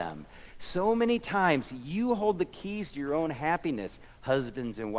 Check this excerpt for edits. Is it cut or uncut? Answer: uncut